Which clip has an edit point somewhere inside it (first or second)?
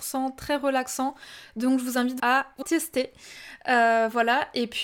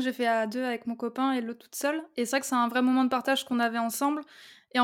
first